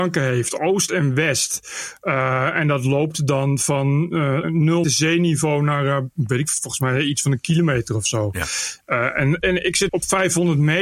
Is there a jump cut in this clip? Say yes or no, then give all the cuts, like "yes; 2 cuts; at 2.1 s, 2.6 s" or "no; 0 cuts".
yes; 3 cuts; at 4.4 s, 4.8 s, 9.9 s